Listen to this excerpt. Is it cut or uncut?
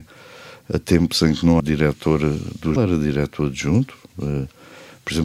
cut